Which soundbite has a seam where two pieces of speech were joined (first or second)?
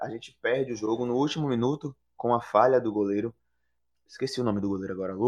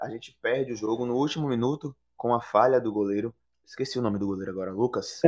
second